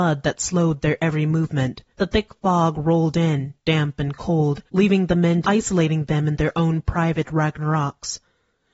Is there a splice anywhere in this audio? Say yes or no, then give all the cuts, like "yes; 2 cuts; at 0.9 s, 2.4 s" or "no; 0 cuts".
yes; 3 cuts; at 1.9 s, 4.7 s, 5.4 s